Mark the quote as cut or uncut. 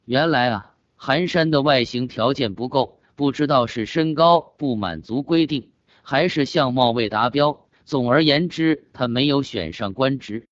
uncut